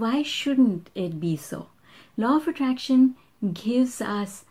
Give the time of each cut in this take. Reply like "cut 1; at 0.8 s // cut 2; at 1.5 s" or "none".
none

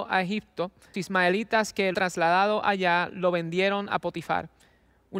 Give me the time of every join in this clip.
cut 1; at 0.9 s // cut 2; at 1.9 s

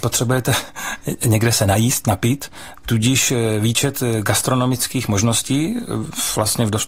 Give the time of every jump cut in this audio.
none

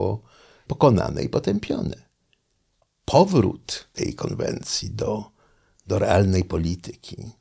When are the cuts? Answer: cut 1; at 3.9 s

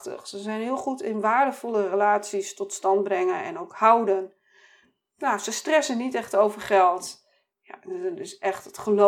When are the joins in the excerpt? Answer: none

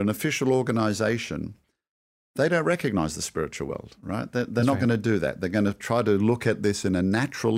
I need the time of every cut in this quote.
none

